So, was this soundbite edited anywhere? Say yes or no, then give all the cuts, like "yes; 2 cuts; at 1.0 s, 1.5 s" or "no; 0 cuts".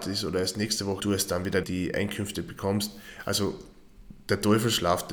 yes; 2 cuts; at 1.0 s, 1.6 s